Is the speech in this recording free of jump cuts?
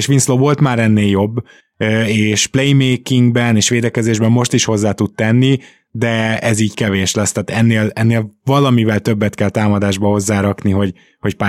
yes; 0 cuts

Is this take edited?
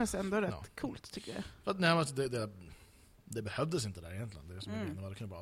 no; 0 cuts

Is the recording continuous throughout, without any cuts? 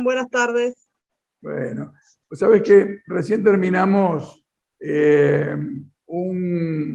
yes; 0 cuts

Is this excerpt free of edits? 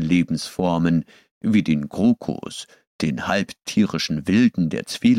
yes; 0 cuts

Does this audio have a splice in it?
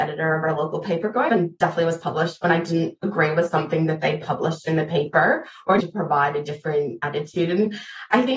yes; 2 cuts; at 1.3 s, 5.8 s

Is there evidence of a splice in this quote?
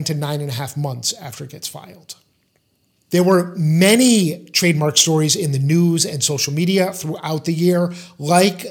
no; 0 cuts

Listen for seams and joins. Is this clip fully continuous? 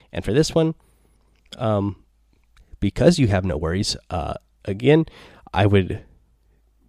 yes; 0 cuts

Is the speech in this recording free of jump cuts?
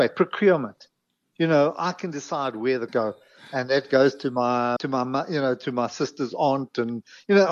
no; 2 cuts; at 2.9 s, 4.8 s

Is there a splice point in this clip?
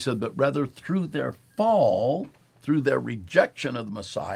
no; 0 cuts

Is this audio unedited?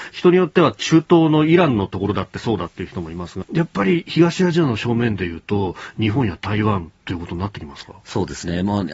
no; 1 cut; at 3.4 s

